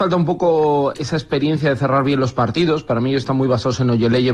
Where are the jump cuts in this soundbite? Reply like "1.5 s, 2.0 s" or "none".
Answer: 0.9 s